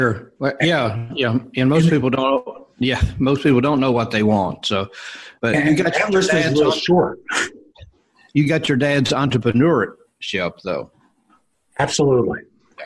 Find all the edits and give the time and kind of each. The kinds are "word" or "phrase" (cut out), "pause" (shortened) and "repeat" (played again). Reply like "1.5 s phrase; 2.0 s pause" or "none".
5.4 s pause